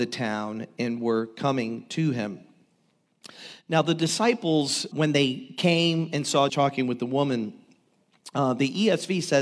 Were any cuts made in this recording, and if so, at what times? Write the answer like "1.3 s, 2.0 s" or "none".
4.9 s, 6.5 s